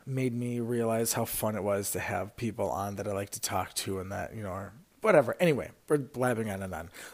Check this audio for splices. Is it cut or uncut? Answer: uncut